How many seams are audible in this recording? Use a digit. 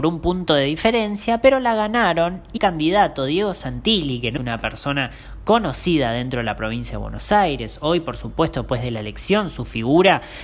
2